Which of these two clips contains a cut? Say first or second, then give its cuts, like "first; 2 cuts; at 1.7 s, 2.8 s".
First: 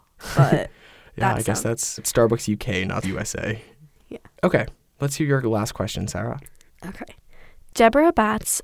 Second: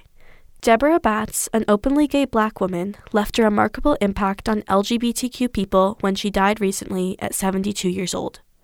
first; 2 cuts; at 2.0 s, 3.0 s